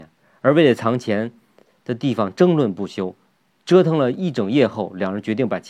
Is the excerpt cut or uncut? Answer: uncut